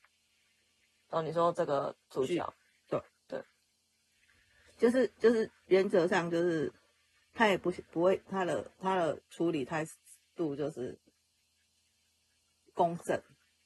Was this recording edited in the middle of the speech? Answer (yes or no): no